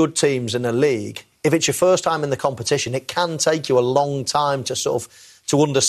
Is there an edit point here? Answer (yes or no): no